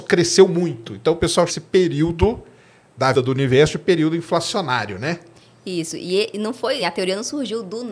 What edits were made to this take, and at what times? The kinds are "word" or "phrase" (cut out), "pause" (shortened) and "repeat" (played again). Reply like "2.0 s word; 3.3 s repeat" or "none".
1.5 s word; 3.1 s word; 6.8 s word